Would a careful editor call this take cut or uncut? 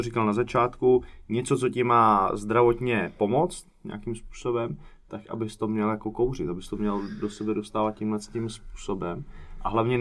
uncut